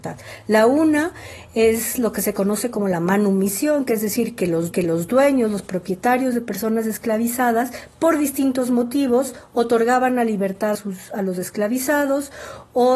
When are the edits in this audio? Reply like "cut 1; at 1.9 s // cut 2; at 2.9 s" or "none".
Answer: cut 1; at 4.7 s // cut 2; at 10.7 s